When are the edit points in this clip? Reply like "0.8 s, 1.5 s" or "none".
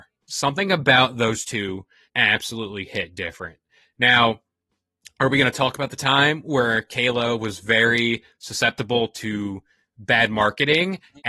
2.1 s

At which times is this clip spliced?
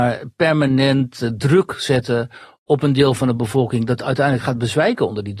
none

